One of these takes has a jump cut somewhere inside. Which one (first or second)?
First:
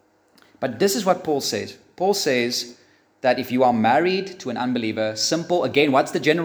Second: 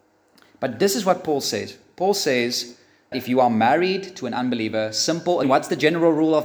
second